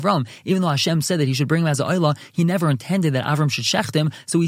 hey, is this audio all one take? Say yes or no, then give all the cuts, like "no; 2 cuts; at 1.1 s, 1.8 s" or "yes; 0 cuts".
yes; 0 cuts